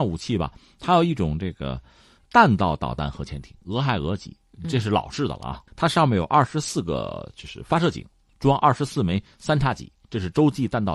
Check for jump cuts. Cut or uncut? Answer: cut